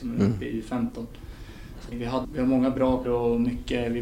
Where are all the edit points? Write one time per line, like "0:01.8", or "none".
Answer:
0:01.9
0:02.2
0:03.0